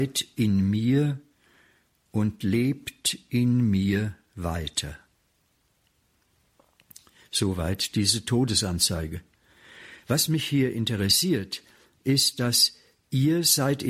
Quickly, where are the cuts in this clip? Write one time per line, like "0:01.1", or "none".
none